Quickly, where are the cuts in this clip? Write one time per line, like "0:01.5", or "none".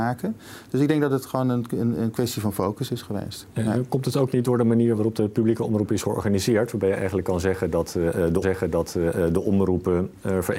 0:08.4